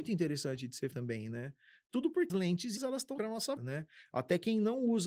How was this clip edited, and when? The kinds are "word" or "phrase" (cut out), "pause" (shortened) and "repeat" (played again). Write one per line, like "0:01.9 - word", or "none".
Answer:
0:00.9 - word
0:02.3 - word
0:02.8 - word
0:03.2 - word
0:03.6 - word